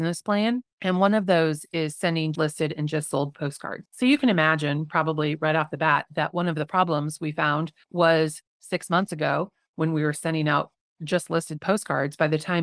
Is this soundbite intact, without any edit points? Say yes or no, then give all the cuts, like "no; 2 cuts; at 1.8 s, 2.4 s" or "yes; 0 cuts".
no; 2 cuts; at 2.3 s, 7.8 s